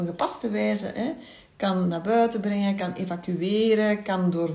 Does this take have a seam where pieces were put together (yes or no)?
no